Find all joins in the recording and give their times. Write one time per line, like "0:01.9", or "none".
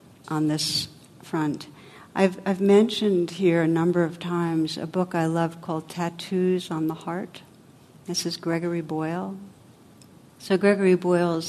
none